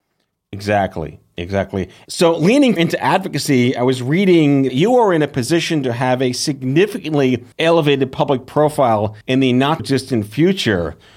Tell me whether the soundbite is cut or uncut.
cut